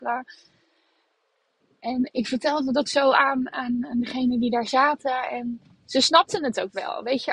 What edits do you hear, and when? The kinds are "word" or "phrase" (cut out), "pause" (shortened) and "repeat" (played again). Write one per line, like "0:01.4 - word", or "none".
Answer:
none